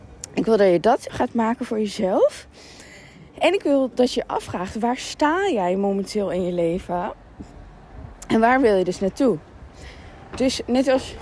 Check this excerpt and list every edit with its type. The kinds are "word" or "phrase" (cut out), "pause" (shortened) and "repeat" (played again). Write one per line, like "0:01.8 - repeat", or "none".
0:01.1 - word
0:03.3 - pause